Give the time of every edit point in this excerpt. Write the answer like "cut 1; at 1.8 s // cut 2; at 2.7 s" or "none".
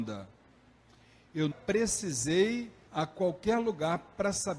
cut 1; at 1.5 s // cut 2; at 2.9 s